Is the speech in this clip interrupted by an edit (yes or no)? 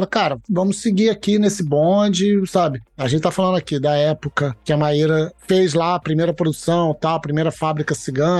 no